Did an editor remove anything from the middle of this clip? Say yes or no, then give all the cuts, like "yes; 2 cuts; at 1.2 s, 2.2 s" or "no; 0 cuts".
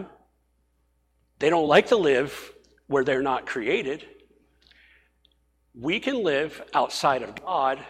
no; 0 cuts